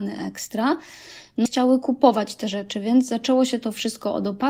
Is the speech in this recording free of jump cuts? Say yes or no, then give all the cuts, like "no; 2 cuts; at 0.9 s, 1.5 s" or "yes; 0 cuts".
no; 1 cut; at 1.5 s